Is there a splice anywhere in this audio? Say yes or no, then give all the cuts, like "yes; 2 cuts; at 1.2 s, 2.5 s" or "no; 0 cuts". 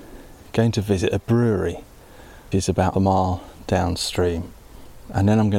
yes; 2 cuts; at 2.5 s, 2.9 s